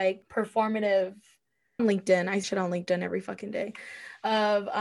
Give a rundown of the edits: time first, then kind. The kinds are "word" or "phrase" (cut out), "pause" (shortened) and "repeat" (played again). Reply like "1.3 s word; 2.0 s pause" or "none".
1.8 s phrase; 2.4 s word